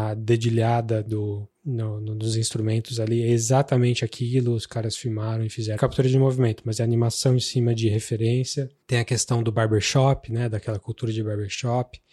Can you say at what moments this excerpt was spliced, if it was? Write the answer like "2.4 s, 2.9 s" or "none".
1.5 s, 5.8 s, 8.8 s